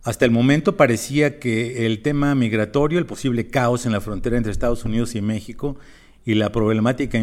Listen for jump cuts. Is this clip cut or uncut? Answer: uncut